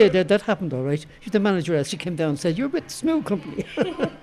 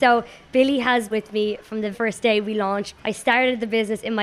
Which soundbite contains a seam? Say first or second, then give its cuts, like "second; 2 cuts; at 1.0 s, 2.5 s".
second; 3 cuts; at 1.1 s, 1.9 s, 3.0 s